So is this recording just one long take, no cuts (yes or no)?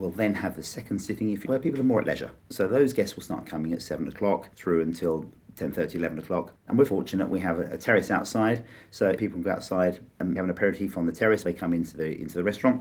no